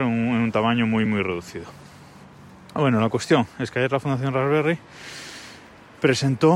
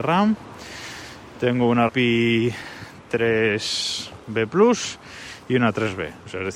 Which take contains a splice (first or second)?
second